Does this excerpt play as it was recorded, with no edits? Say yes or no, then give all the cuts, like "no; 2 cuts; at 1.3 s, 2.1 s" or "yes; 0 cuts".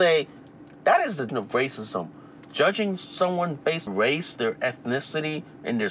no; 2 cuts; at 1.3 s, 3.9 s